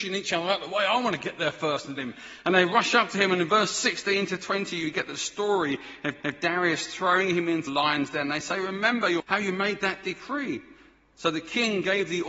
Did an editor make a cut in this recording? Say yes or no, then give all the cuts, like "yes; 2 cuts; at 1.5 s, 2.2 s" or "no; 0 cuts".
yes; 4 cuts; at 2.0 s, 6.2 s, 7.7 s, 9.2 s